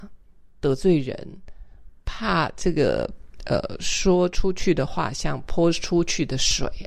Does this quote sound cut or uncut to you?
uncut